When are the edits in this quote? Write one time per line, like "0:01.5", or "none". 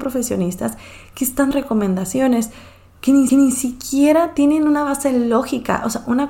0:01.5
0:03.3